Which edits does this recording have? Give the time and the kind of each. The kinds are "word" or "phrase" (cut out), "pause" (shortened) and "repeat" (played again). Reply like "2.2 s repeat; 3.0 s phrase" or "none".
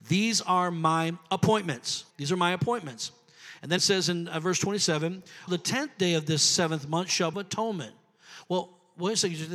2.1 s pause; 3.8 s phrase; 5.5 s word; 7.3 s phrase